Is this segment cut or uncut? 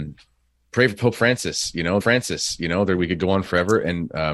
cut